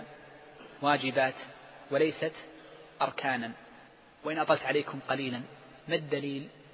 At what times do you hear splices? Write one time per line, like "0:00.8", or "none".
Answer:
0:03.9
0:05.8